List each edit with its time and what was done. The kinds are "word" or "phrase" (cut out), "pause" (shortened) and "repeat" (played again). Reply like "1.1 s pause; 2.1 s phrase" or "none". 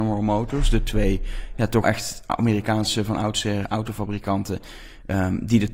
1.8 s word; 3.6 s word